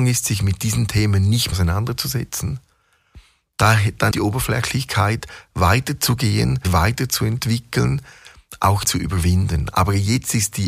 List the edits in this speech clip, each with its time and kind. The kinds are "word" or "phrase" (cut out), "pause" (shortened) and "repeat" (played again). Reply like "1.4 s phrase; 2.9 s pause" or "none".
1.5 s word; 4.1 s word; 6.6 s word; 8.8 s word